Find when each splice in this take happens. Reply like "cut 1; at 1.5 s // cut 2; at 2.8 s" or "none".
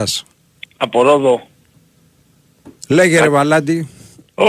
cut 1; at 2.8 s

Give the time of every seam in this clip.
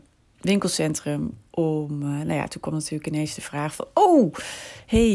none

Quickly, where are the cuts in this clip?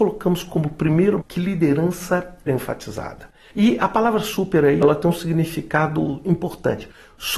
cut 1; at 1.2 s // cut 2; at 2.5 s // cut 3; at 4.8 s

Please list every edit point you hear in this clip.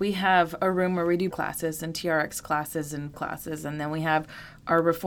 cut 1; at 1.3 s // cut 2; at 3.1 s

